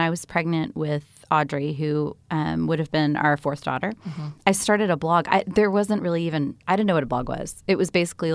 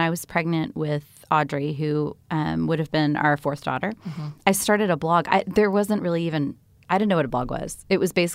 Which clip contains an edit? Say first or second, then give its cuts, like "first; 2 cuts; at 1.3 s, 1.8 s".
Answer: first; 1 cut; at 6.6 s